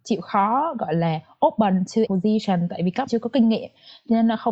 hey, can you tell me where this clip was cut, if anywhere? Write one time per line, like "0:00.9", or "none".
0:02.1
0:03.1

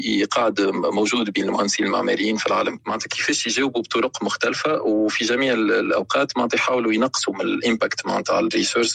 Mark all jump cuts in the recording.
0:02.8

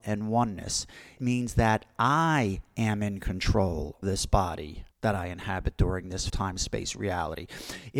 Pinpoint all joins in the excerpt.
0:01.2
0:04.0
0:04.9
0:06.3

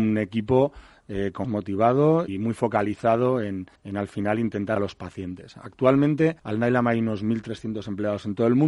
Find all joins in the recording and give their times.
0:01.4
0:02.3
0:03.8
0:04.8
0:06.4

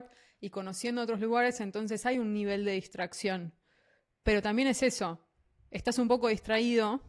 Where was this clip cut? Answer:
none

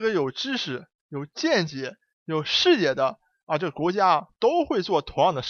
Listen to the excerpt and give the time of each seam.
none

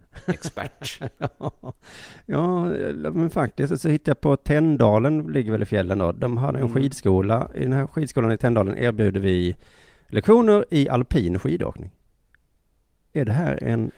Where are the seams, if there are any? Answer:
none

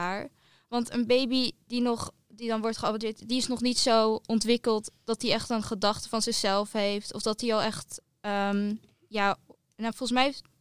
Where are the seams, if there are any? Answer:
none

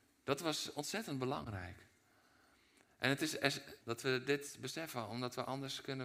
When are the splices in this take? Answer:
0:03.8

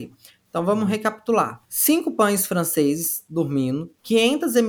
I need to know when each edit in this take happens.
none

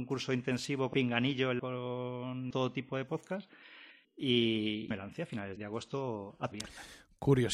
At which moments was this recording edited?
0:00.9
0:01.6
0:02.5
0:04.9
0:05.6
0:06.5

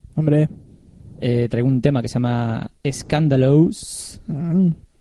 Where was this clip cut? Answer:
0:02.8

